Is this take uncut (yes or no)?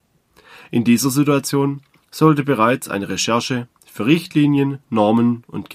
yes